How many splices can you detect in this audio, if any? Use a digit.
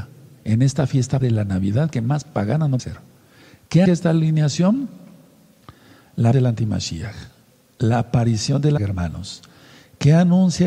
5